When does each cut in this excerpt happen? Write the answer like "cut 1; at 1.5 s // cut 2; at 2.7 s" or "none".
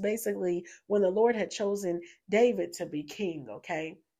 none